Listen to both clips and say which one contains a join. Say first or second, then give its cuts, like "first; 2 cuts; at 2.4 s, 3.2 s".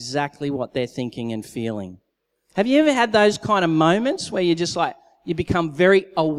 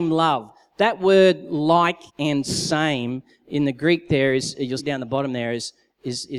second; 2 cuts; at 2.1 s, 4.8 s